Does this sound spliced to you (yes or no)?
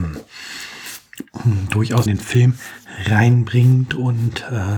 yes